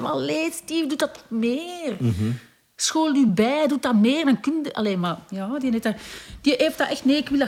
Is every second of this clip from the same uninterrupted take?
yes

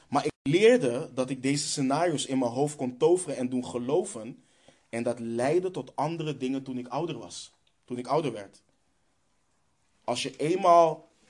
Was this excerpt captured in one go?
yes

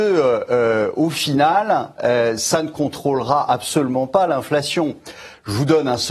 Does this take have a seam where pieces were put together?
no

